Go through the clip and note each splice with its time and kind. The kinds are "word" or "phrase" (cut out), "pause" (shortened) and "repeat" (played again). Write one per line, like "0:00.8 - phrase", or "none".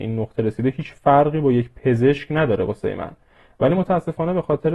none